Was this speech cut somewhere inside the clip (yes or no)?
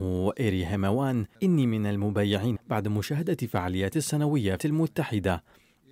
yes